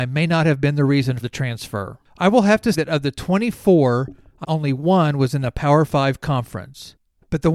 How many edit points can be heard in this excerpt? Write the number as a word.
three